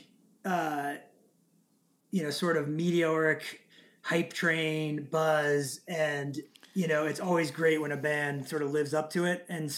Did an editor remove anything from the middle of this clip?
no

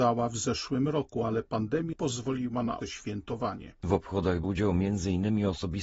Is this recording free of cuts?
no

